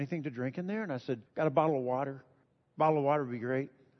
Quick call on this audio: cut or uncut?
cut